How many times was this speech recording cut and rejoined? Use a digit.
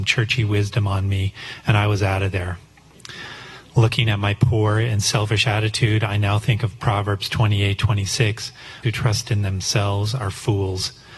1